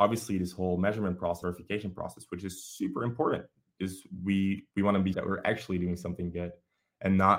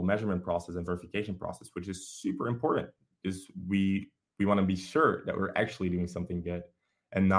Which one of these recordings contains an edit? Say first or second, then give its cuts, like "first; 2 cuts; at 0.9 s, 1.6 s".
first; 3 cuts; at 1.4 s, 4.7 s, 5.1 s